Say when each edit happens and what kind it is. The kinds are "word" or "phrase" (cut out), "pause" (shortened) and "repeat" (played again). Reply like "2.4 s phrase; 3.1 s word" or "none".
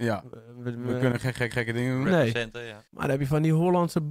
1.5 s repeat; 2.9 s pause

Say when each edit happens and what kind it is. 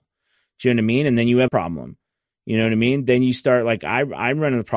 1.5 s word

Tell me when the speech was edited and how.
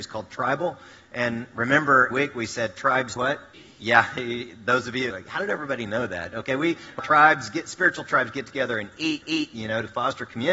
2.1 s word; 3.2 s word; 3.5 s pause; 5.1 s phrase; 7.0 s phrase; 9.2 s repeat

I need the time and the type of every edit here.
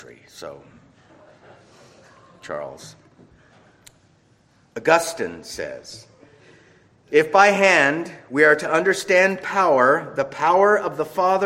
none

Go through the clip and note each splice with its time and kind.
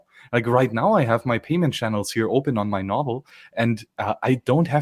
none

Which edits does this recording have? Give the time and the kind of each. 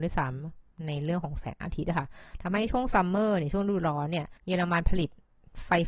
4.4 s pause

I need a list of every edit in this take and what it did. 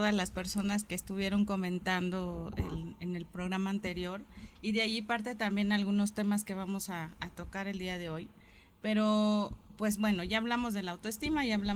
none

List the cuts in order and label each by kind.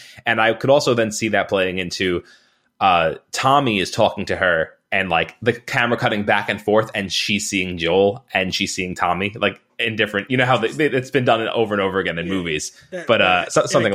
none

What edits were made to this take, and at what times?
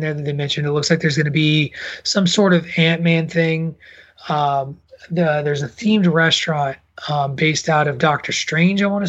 none

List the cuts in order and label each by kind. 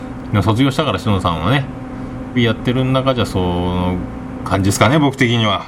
2.3 s word

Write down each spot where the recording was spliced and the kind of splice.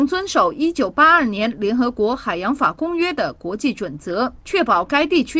4.4 s pause

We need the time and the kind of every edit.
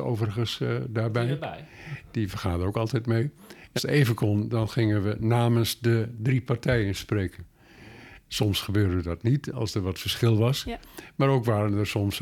3.8 s word

